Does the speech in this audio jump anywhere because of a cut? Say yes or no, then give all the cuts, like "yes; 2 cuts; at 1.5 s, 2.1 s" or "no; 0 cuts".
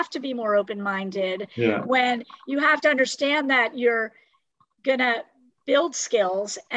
no; 0 cuts